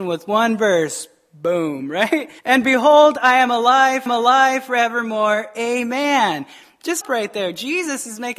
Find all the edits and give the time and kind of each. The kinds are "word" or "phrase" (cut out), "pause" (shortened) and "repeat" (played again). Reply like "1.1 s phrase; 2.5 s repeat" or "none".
2.4 s pause; 4.1 s repeat; 7.0 s phrase